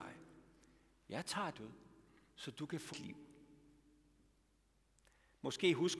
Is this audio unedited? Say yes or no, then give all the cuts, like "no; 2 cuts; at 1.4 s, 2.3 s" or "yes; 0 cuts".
no; 2 cuts; at 1.5 s, 2.9 s